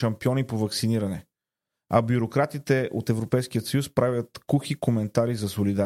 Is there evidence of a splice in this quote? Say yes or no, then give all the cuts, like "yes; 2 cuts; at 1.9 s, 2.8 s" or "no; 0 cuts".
no; 0 cuts